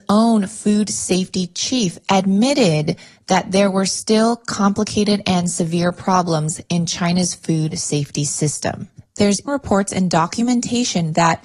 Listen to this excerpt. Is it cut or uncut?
cut